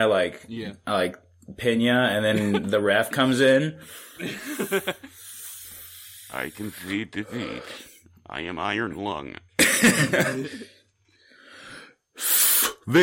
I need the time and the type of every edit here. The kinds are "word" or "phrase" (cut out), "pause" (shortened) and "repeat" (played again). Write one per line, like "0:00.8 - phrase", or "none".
none

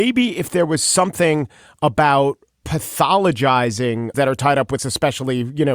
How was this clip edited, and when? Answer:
0:02.6 - word
0:04.1 - word
0:04.8 - word

